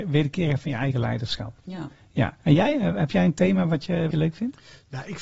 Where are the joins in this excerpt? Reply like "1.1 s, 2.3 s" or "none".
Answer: 2.4 s, 4.1 s